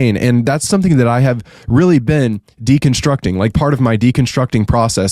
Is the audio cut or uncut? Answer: cut